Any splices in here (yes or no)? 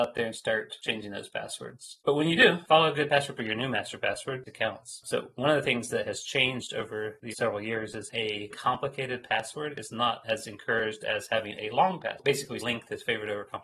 yes